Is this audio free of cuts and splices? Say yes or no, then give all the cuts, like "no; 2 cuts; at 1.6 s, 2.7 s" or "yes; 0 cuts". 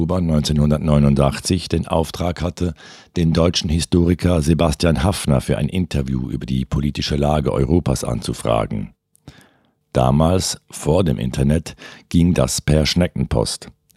yes; 0 cuts